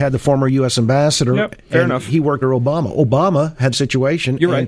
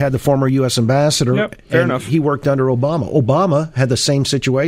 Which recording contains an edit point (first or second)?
first